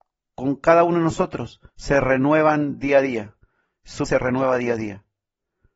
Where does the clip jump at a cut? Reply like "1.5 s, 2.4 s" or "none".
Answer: 1.7 s, 4.0 s